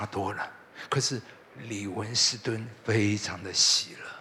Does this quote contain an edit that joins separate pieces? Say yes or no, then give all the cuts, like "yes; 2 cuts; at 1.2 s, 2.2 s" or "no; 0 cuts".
no; 0 cuts